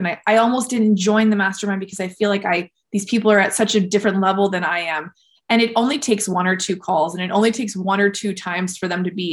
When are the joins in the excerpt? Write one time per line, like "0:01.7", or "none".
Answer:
none